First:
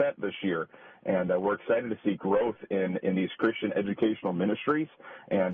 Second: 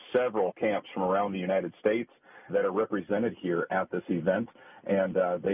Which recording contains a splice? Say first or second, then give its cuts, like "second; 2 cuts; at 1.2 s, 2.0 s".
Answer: second; 1 cut; at 2.5 s